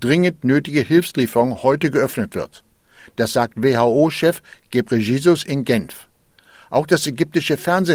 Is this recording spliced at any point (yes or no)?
no